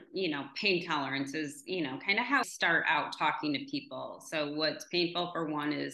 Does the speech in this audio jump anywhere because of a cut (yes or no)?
yes